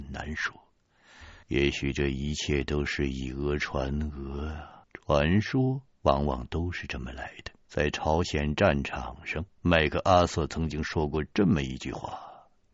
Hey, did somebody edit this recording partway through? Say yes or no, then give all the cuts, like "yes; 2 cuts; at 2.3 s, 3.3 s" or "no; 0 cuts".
yes; 5 cuts; at 1.4 s, 4.8 s, 5.9 s, 7.6 s, 9.5 s